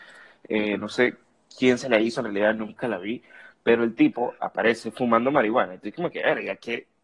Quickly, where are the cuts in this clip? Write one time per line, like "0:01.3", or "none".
none

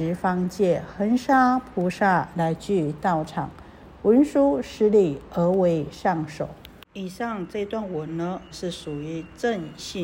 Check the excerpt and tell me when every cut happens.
0:08.5

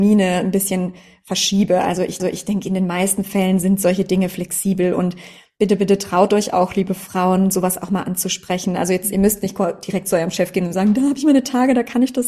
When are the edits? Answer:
0:02.2

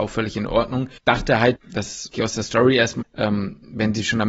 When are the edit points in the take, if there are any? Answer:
0:01.0
0:01.6
0:02.1
0:03.0

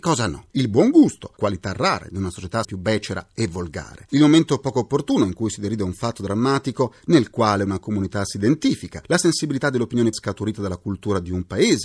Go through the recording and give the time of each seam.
0:02.6
0:10.1

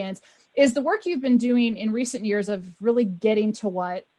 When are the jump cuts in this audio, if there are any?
none

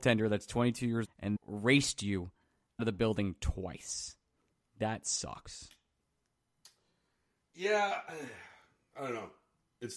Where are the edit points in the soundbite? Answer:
0:01.0
0:01.4
0:02.8

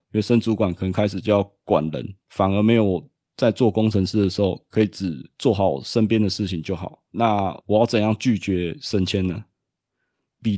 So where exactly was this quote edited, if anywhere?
0:02.2
0:07.1

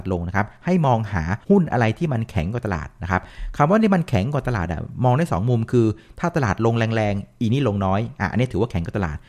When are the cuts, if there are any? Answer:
0:01.4

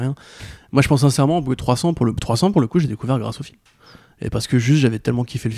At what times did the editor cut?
none

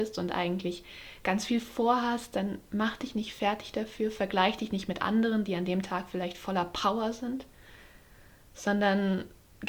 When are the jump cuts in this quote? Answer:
none

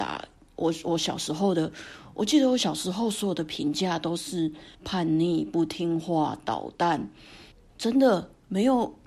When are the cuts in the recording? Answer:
0:04.7
0:07.5

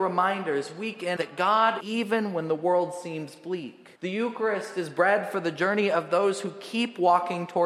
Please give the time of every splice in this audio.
0:01.2
0:01.8
0:04.0

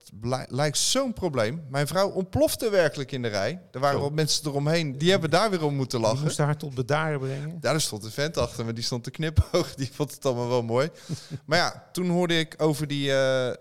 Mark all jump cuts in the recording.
0:04.9

